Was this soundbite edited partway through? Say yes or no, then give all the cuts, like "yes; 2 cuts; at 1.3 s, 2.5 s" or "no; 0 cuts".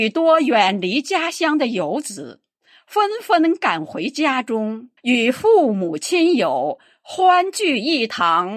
yes; 1 cut; at 5.0 s